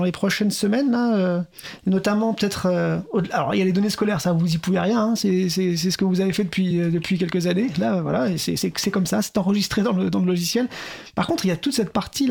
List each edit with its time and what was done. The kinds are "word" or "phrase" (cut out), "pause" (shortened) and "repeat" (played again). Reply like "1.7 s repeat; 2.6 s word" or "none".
none

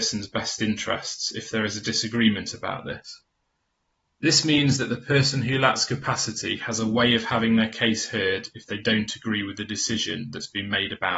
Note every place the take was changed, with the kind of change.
none

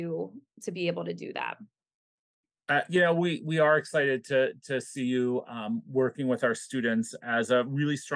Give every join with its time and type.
none

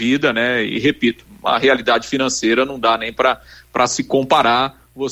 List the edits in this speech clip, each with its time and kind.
none

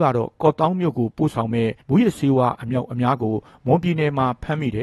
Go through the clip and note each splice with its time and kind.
1.8 s pause

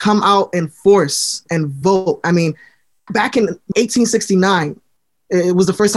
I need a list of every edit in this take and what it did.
1.5 s word; 3.1 s word; 3.7 s word

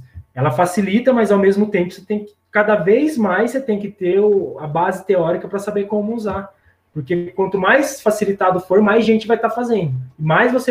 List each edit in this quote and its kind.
none

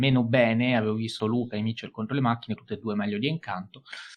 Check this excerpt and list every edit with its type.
1.2 s word; 2.6 s word

